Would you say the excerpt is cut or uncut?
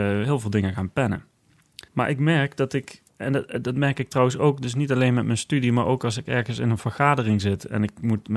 cut